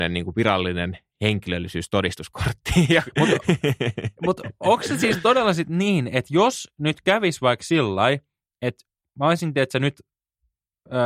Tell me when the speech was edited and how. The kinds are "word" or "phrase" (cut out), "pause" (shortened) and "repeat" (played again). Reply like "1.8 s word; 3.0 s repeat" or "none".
none